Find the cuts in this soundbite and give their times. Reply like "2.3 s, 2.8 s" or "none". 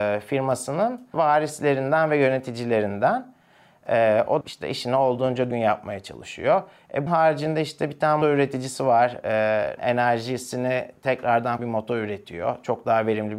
1.1 s, 4.4 s, 5.5 s, 7.1 s, 8.2 s, 9.8 s, 11.6 s